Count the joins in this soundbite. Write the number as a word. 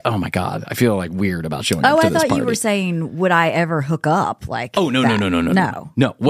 zero